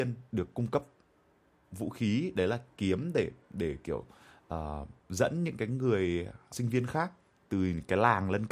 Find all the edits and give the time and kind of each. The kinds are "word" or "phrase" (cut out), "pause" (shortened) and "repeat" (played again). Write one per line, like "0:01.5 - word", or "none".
0:03.4 - pause
0:05.0 - pause
0:06.5 - word